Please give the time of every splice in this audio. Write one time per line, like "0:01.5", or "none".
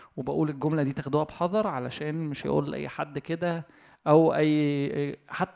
0:02.4